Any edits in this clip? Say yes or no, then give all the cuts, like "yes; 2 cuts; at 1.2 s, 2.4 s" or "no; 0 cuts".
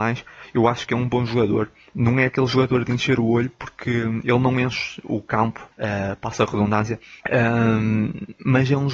yes; 2 cuts; at 5.7 s, 7.2 s